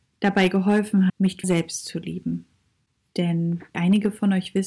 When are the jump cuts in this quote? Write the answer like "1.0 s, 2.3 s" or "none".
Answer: 1.1 s, 1.4 s, 3.7 s